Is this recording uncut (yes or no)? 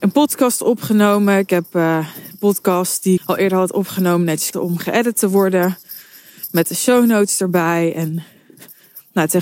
no